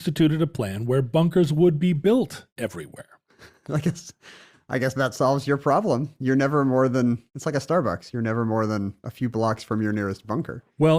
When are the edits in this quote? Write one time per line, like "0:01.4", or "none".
0:02.5
0:07.3
0:09.0